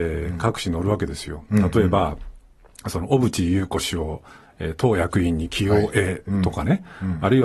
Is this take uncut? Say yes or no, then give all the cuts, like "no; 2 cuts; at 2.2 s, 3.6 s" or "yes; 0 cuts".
yes; 0 cuts